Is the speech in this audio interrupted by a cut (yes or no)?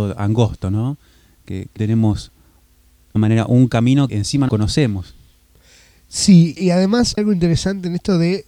yes